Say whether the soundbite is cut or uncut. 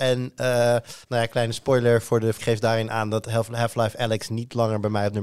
cut